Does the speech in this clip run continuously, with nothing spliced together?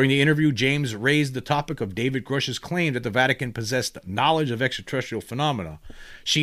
yes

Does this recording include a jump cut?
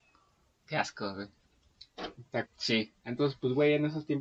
yes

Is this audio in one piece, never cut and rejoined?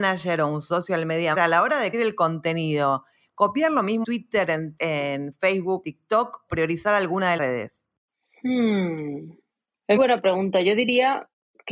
no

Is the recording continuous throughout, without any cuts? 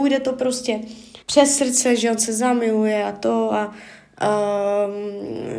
no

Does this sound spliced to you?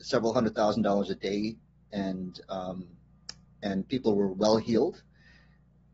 no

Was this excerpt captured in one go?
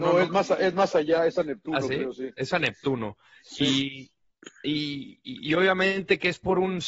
no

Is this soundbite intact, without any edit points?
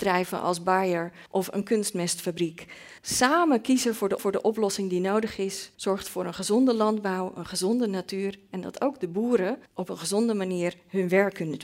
no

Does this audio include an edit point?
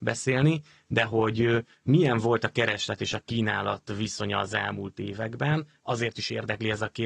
no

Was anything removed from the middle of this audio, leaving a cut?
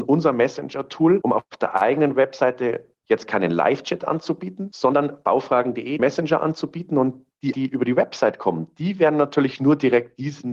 yes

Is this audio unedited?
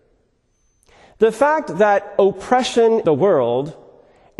no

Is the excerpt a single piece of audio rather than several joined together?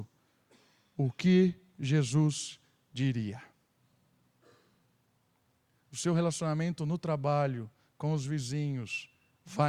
yes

